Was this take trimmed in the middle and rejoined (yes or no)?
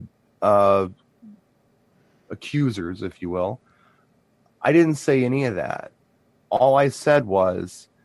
no